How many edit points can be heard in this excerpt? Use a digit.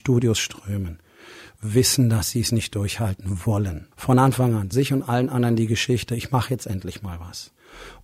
2